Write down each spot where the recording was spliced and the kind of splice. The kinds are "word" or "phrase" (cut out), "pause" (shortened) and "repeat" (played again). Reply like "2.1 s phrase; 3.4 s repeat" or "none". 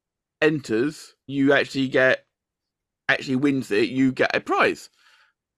1.3 s word

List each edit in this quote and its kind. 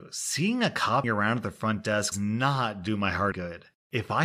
1.0 s word; 2.1 s word; 3.3 s word

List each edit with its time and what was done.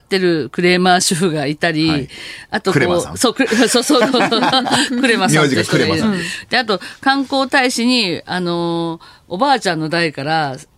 none

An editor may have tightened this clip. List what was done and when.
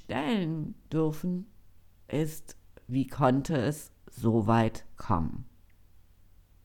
none

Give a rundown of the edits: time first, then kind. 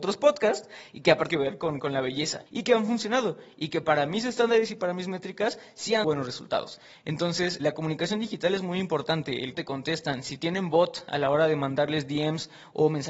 1.3 s phrase; 2.5 s pause; 6.0 s word; 7.6 s word; 9.5 s word

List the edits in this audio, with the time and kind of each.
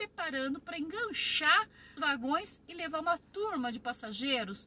2.0 s word

